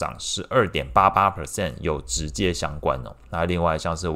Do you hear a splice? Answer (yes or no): no